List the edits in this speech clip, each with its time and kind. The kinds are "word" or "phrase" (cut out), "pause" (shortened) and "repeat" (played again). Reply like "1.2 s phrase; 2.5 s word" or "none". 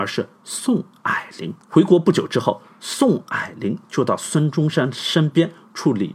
1.6 s pause